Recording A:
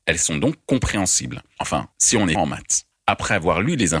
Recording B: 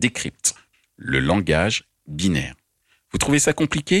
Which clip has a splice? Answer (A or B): A